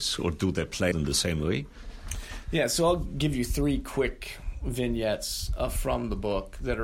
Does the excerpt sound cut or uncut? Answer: cut